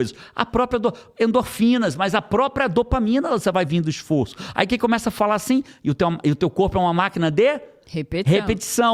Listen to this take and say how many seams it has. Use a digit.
0